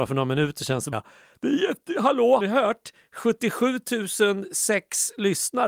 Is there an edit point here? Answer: yes; 2 cuts; at 0.9 s, 2.4 s

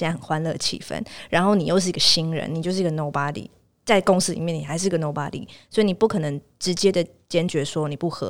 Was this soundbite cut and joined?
no; 0 cuts

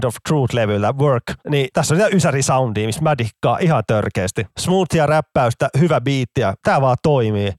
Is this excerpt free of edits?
yes; 0 cuts

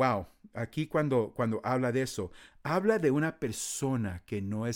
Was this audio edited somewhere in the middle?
no; 0 cuts

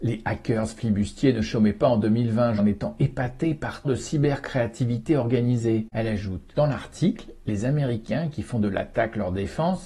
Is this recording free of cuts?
no; 2 cuts; at 2.6 s, 3.8 s

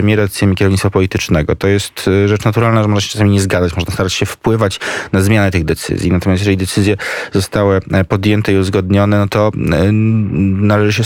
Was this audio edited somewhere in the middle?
no; 0 cuts

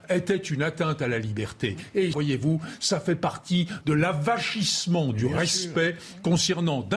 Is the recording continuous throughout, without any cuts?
no; 2 cuts; at 2.1 s, 3.8 s

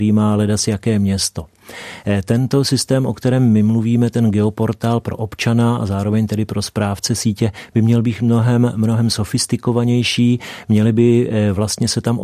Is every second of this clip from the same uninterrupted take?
yes; 0 cuts

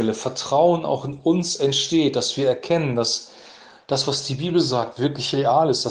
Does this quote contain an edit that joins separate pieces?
no; 0 cuts

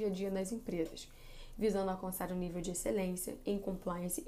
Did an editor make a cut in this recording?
no; 0 cuts

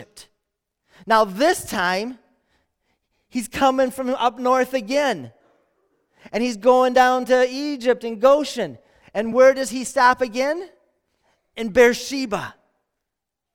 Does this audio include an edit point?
no; 0 cuts

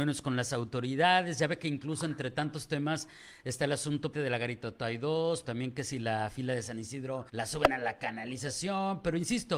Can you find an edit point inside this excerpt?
yes; 3 cuts; at 4.1 s, 5.4 s, 7.3 s

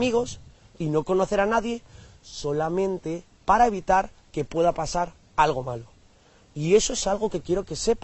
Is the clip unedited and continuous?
yes; 0 cuts

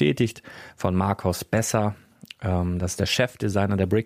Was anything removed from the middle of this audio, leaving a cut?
no; 0 cuts

